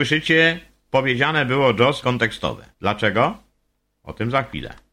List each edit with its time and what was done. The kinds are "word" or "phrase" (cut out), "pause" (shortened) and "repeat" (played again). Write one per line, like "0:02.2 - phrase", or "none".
0:02.0 - word
0:02.7 - pause